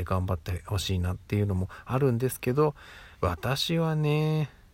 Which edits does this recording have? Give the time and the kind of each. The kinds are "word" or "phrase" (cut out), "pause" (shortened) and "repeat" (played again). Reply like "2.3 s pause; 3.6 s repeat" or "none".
1.2 s pause; 3.1 s pause